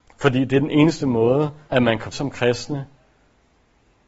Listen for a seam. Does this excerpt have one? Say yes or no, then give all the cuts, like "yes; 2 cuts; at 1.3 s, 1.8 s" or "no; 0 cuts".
yes; 2 cuts; at 1.6 s, 2.1 s